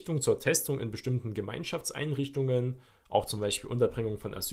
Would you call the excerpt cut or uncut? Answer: uncut